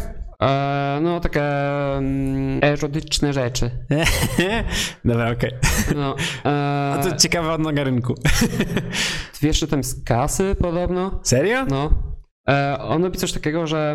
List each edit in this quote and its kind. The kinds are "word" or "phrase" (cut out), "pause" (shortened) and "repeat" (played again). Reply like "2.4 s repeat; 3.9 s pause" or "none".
2.6 s word